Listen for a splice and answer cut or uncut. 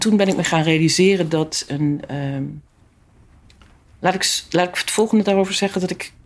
cut